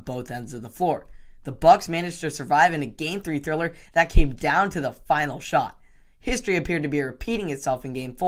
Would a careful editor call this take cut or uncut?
uncut